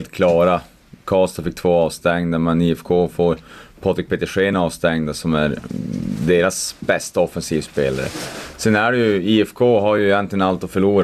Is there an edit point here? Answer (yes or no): no